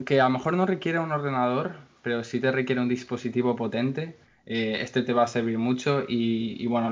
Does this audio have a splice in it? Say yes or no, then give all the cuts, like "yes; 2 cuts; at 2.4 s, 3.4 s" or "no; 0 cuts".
no; 0 cuts